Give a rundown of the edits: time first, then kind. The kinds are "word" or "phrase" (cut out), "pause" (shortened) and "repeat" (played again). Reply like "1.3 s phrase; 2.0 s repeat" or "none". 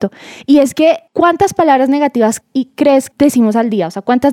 1.1 s pause; 2.4 s word; 3.1 s word